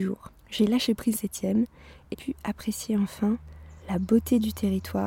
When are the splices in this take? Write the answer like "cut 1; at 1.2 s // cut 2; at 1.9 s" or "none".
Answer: cut 1; at 1.1 s // cut 2; at 2.1 s // cut 3; at 3.8 s